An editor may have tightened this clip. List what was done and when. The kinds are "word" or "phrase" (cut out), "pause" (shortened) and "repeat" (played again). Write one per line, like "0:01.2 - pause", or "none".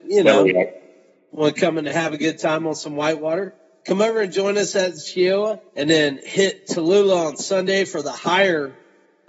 0:05.7 - pause